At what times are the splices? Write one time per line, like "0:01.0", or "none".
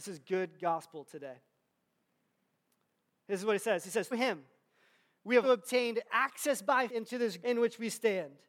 0:04.1
0:05.4
0:06.9
0:07.4